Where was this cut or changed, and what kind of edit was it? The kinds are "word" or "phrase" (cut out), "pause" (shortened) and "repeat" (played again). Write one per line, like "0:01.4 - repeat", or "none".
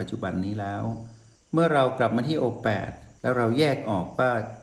0:01.4 - pause